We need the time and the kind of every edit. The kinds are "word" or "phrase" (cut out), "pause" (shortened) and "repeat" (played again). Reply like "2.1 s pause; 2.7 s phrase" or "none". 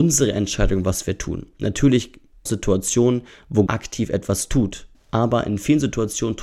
2.5 s phrase; 3.7 s word; 4.9 s pause